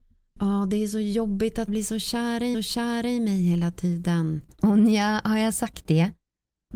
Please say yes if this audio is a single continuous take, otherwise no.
no